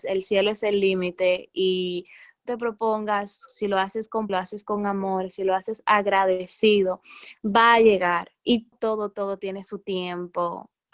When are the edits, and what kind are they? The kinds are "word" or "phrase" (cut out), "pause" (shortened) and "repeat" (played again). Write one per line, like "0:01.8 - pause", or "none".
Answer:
0:02.5 - phrase
0:04.3 - phrase
0:08.7 - word